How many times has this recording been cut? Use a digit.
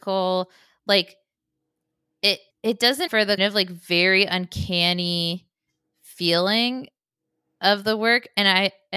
3